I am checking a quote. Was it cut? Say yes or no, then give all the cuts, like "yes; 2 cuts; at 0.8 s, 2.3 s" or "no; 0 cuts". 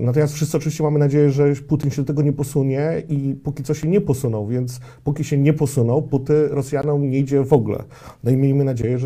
no; 0 cuts